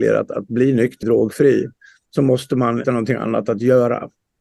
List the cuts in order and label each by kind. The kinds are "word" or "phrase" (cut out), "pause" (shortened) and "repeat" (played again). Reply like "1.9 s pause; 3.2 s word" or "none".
1.0 s phrase; 2.8 s phrase